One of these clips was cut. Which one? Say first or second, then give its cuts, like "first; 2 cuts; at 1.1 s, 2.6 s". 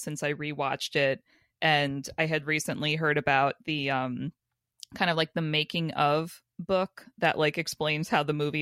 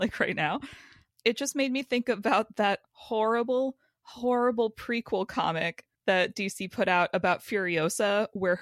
second; 1 cut; at 5.9 s